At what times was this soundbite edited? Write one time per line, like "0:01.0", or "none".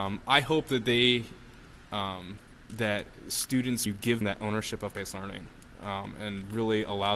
0:02.7
0:03.9
0:04.2
0:04.9